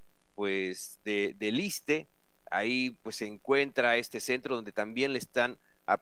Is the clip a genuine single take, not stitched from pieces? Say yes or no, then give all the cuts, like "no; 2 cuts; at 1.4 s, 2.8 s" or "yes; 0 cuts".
yes; 0 cuts